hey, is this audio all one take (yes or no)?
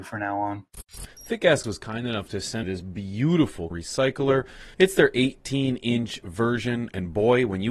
no